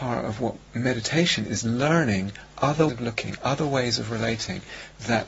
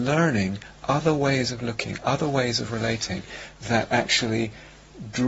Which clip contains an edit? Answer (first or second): first